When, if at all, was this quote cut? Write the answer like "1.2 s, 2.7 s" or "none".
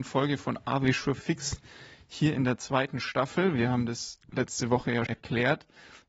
4.2 s, 5.1 s